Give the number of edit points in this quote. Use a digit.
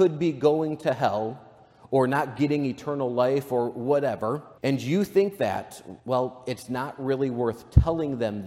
2